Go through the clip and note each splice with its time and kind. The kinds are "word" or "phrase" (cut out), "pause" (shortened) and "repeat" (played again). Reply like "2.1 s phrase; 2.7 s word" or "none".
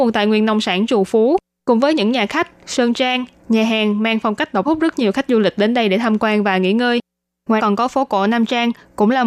4.7 s phrase; 7.6 s word

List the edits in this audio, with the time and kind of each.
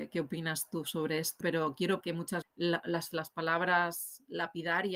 1.4 s word; 2.0 s word; 2.4 s word; 3.1 s word

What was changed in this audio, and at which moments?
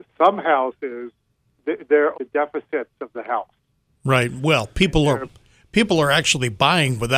2.1 s word; 3.9 s pause

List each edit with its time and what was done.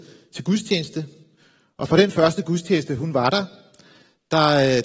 none

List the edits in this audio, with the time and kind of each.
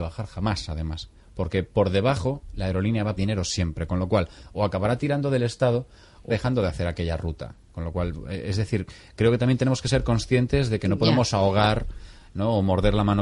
3.2 s word; 6.3 s word

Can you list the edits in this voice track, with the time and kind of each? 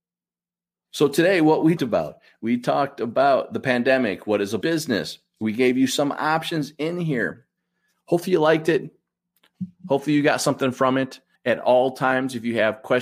1.8 s word; 4.6 s word; 11.3 s pause

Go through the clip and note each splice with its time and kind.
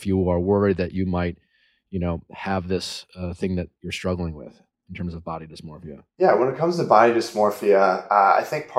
6.1 s pause

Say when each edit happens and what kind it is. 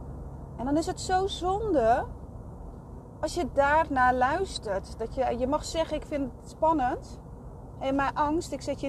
none

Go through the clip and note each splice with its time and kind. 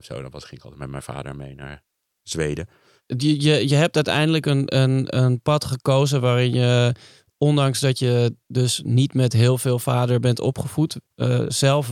none

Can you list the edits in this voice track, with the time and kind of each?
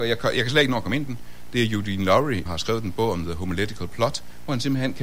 1.1 s word; 2.5 s word

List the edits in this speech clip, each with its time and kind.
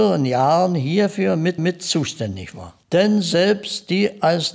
1.6 s repeat; 2.8 s pause

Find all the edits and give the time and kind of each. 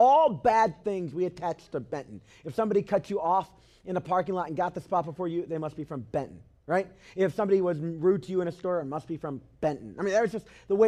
none

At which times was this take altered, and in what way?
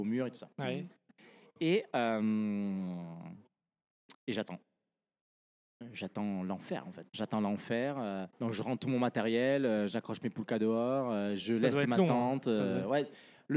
4.1 s pause; 7.1 s pause; 8.3 s pause

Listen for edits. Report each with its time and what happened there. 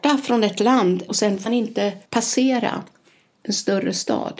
1.1 s phrase; 1.5 s word; 2.1 s pause

